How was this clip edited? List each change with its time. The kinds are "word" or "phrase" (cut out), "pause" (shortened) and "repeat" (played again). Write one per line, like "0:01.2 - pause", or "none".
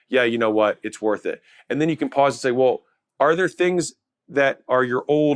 none